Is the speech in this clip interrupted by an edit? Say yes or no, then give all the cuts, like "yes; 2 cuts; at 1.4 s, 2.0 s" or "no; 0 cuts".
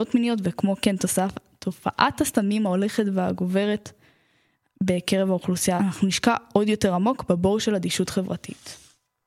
yes; 1 cut; at 5.8 s